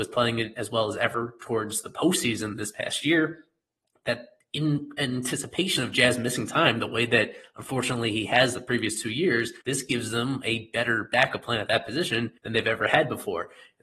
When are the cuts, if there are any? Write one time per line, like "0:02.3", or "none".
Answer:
0:09.6
0:12.4